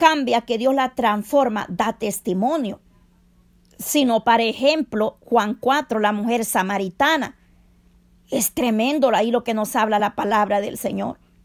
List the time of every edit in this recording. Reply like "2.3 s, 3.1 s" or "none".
none